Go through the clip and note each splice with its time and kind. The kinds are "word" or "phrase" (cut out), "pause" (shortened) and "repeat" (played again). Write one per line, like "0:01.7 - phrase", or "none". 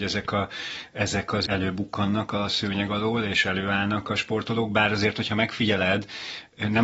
0:01.5 - word